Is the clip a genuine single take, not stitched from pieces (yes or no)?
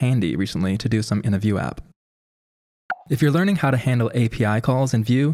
no